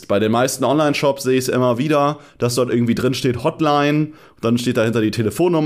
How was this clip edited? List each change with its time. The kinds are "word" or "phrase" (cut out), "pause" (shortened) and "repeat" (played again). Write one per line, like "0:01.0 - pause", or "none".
none